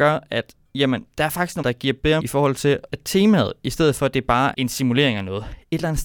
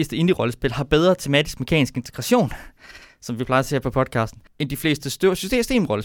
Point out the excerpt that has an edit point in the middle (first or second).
first